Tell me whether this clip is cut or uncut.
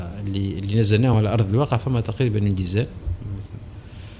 uncut